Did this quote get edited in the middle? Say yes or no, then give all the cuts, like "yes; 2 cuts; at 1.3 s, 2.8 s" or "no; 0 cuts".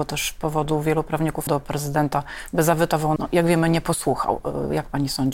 yes; 2 cuts; at 1.5 s, 3.2 s